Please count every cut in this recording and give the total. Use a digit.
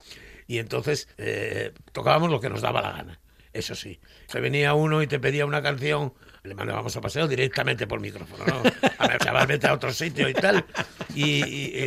4